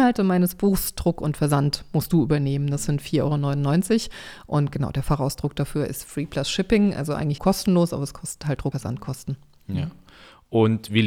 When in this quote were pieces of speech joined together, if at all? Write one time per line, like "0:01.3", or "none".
0:07.4
0:08.7